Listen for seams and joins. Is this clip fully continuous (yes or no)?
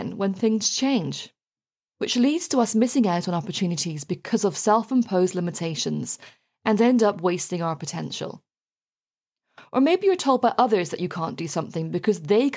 yes